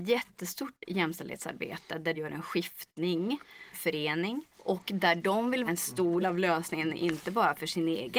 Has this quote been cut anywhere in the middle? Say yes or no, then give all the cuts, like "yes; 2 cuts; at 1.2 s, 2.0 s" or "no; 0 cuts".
yes; 5 cuts; at 2.1 s, 3.7 s, 4.5 s, 5.7 s, 6.2 s